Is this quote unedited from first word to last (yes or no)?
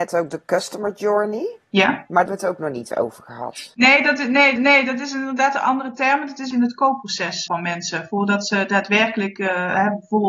no